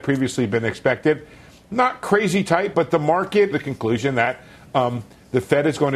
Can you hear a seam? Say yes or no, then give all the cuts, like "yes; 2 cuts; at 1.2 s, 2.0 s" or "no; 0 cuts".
yes; 2 cuts; at 2.7 s, 3.5 s